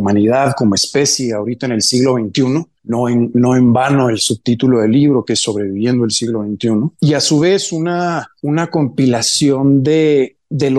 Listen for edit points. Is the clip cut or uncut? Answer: cut